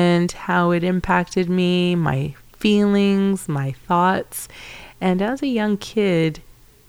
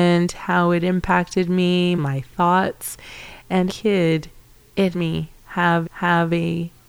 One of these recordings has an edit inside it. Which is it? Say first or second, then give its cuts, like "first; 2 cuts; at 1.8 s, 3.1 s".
second; 4 cuts; at 2.0 s, 3.7 s, 4.9 s, 5.8 s